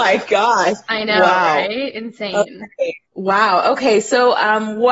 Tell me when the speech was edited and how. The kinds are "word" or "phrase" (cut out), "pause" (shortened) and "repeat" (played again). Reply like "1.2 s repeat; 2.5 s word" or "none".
3.1 s pause